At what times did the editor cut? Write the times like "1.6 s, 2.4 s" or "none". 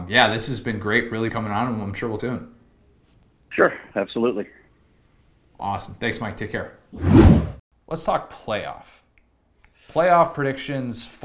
1.3 s, 2.2 s